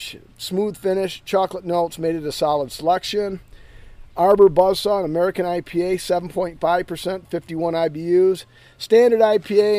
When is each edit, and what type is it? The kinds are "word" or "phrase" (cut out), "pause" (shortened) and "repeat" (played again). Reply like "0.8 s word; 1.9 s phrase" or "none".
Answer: none